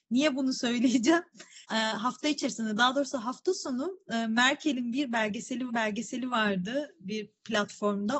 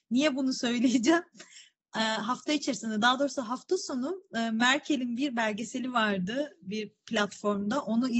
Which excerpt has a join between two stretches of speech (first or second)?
first